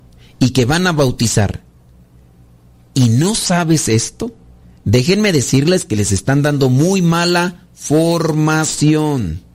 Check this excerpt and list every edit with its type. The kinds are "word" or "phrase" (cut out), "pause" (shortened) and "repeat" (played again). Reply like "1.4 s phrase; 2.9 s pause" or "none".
4.6 s pause